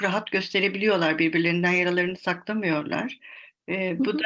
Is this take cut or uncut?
uncut